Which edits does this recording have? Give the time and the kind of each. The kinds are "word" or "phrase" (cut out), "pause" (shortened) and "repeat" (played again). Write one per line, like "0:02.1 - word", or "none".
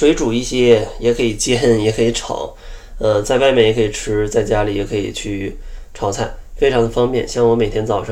none